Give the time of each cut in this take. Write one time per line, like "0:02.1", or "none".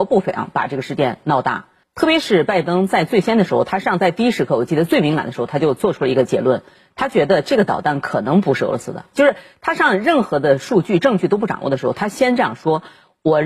0:01.8